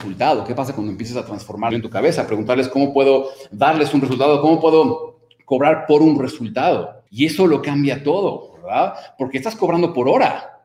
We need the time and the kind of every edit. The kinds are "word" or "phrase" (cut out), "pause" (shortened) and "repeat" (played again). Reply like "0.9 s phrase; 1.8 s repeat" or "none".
1.7 s phrase; 7.1 s pause

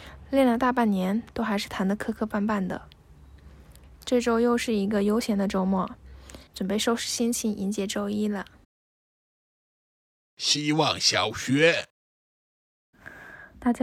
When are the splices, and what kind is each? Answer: 6.5 s pause

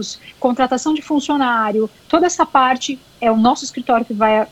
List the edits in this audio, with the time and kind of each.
none

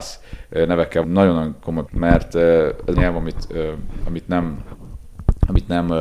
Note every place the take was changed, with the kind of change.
1.0 s word; 1.9 s word; 2.9 s word

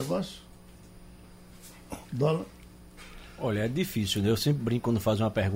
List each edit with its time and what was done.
2.0 s pause

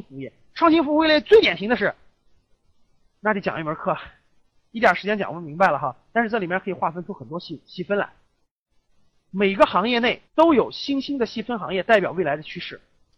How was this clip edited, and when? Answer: 10.3 s pause

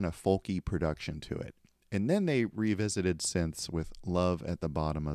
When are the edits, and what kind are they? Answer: none

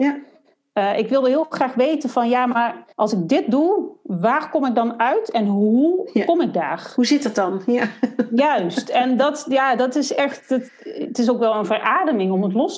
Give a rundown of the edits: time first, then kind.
2.9 s pause

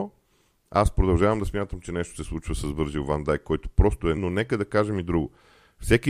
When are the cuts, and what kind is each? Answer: 4.2 s word

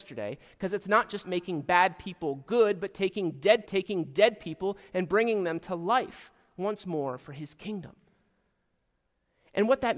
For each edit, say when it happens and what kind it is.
1.2 s word; 3.7 s repeat

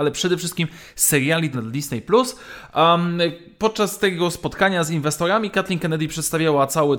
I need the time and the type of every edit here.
1.5 s word

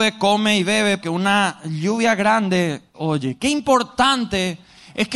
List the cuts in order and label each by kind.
1.0 s word; 2.9 s word

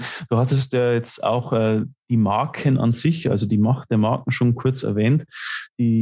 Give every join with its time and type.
none

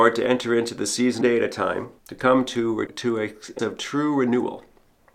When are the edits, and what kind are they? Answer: 1.2 s word; 2.0 s pause; 2.9 s word; 3.6 s word

